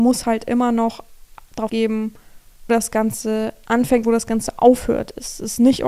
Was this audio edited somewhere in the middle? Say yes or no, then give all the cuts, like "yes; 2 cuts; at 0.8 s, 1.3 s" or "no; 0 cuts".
yes; 3 cuts; at 1.7 s, 2.7 s, 4.0 s